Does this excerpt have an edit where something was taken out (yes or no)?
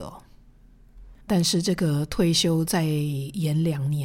yes